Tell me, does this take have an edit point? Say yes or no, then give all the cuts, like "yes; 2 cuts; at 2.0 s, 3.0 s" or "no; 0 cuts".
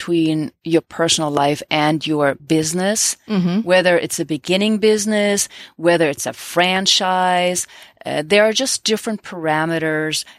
no; 0 cuts